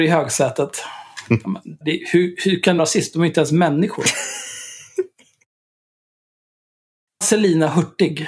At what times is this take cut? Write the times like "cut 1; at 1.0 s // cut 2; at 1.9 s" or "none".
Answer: cut 1; at 1.8 s // cut 2; at 2.8 s // cut 3; at 7.2 s